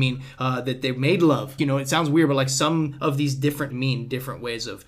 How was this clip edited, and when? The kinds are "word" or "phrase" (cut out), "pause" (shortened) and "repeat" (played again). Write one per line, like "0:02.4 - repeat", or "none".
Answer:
0:01.6 - word
0:03.7 - phrase